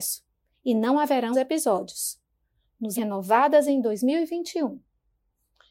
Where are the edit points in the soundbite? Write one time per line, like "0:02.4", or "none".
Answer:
0:01.3
0:03.0